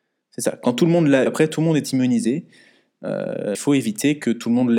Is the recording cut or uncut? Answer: cut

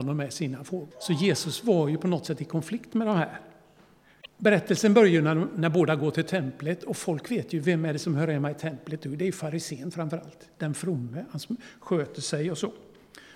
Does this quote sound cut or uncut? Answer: cut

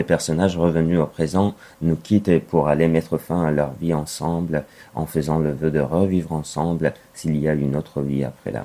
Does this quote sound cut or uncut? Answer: uncut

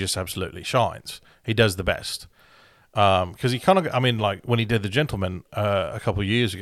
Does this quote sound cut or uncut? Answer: uncut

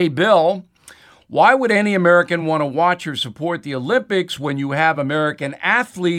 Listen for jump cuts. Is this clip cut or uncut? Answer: uncut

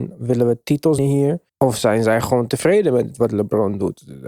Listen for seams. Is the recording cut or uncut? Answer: cut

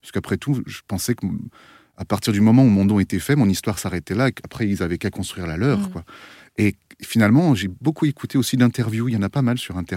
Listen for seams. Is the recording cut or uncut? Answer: uncut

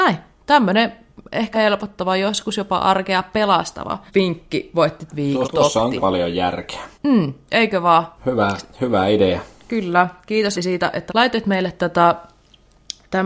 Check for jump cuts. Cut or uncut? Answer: cut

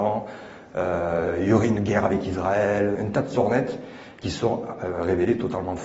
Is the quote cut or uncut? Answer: cut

